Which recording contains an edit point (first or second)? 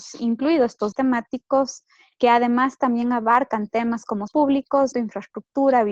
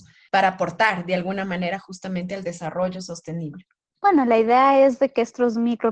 first